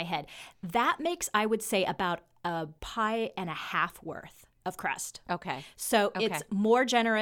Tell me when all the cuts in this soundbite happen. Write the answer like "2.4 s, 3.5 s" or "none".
2.8 s